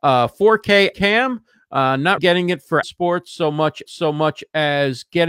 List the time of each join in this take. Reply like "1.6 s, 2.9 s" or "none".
0.9 s, 2.2 s, 2.8 s, 3.9 s